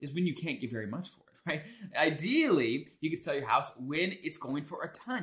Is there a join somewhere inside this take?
no; 0 cuts

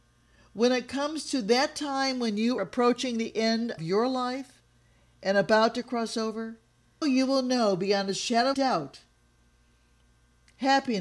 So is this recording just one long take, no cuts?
no; 4 cuts; at 2.6 s, 3.8 s, 7.0 s, 8.5 s

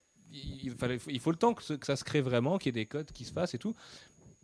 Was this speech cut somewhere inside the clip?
no; 0 cuts

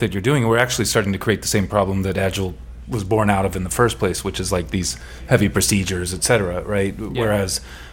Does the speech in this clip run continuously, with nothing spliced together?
yes; 0 cuts

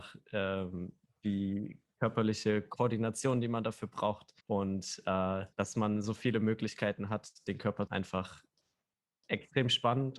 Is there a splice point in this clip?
yes; 3 cuts; at 4.4 s, 5.5 s, 7.9 s

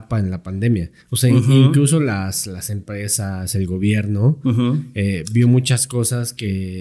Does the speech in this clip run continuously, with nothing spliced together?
yes; 0 cuts

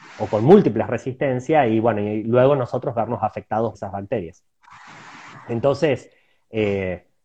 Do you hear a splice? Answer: yes; 1 cut; at 3.7 s

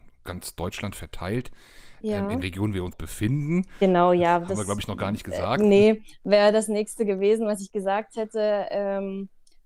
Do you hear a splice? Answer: yes; 2 cuts; at 2.4 s, 2.9 s

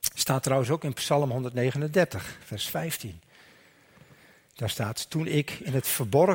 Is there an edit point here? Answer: no; 0 cuts

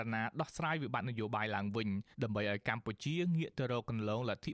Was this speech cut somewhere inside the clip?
yes; 1 cut; at 2.1 s

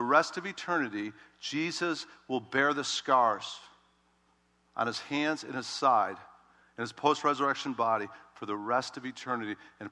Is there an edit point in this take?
no; 0 cuts

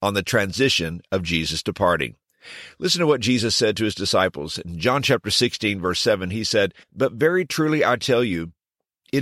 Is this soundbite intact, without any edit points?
no; 1 cut; at 6.8 s

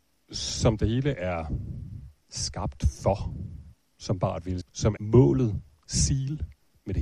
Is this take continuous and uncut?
no; 4 cuts; at 2.2 s, 3.7 s, 4.6 s, 5.0 s

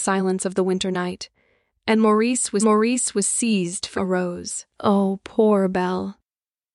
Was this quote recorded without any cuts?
no; 3 cuts; at 2.6 s, 4.0 s, 4.7 s

